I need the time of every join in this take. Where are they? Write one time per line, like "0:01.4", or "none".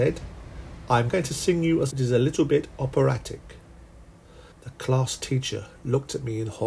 0:01.1
0:01.9
0:04.5